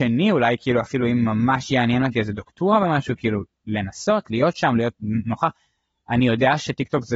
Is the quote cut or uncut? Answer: uncut